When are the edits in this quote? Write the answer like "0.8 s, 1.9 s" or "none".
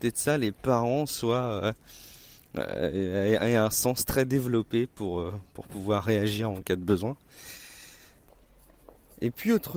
none

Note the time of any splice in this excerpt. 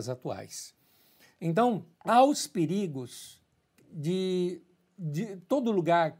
1.9 s

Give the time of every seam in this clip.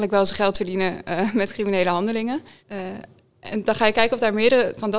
2.6 s

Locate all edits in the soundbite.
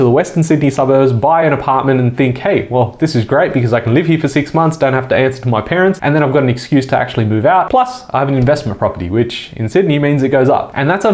none

